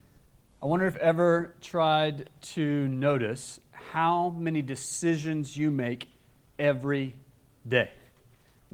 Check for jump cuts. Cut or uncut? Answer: cut